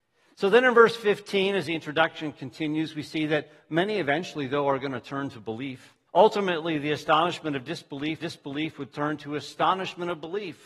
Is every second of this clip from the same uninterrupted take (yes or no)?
no